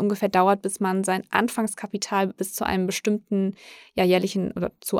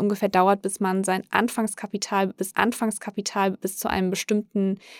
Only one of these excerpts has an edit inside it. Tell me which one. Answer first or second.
second